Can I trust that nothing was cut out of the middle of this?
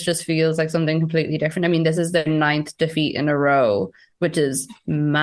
yes; 0 cuts

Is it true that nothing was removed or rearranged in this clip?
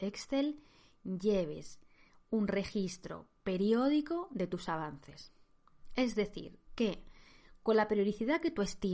yes; 0 cuts

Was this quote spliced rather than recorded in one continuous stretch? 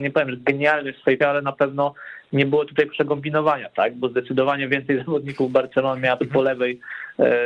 yes; 2 cuts; at 1.2 s, 6.2 s

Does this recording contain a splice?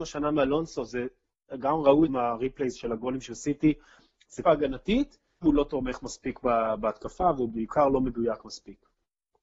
yes; 3 cuts; at 2.1 s, 4.4 s, 5.4 s

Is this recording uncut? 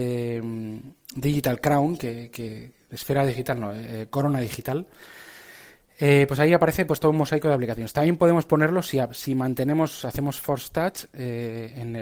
yes; 0 cuts

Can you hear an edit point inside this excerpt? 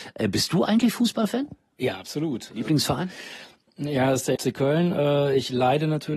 yes; 1 cut; at 4.4 s

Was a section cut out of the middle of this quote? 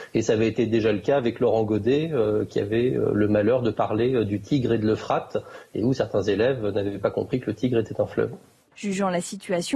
no; 0 cuts

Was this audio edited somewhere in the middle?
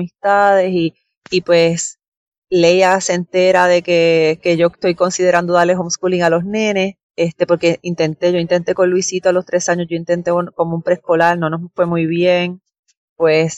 yes; 1 cut; at 7.0 s

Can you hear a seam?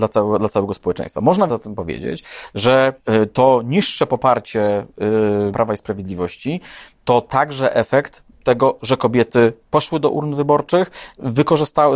yes; 4 cuts; at 1.5 s, 3.0 s, 5.5 s, 8.3 s

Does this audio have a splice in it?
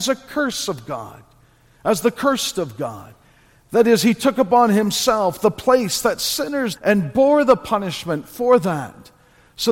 yes; 1 cut; at 6.8 s

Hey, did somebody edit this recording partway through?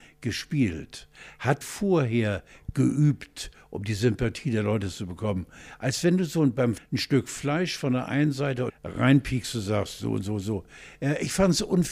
yes; 3 cuts; at 1.6 s, 6.8 s, 8.7 s

